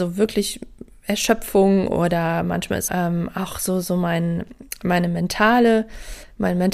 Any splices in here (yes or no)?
yes